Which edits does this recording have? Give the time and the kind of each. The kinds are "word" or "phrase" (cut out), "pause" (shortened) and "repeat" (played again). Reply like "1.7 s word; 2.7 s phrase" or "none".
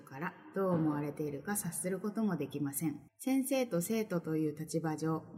3.1 s pause